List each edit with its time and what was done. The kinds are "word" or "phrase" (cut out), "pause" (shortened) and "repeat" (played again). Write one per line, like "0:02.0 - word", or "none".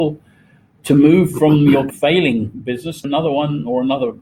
0:01.9 - word
0:03.0 - word